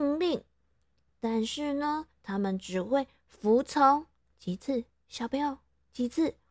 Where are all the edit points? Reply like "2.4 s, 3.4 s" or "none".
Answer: 2.1 s, 4.2 s